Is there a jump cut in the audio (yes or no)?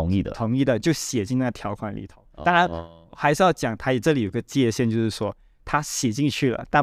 no